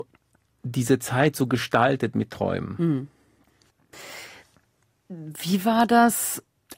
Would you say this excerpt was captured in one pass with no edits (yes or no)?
yes